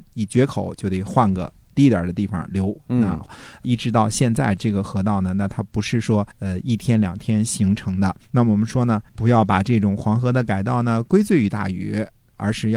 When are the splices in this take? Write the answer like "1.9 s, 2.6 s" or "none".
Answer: 6.3 s, 8.2 s, 9.1 s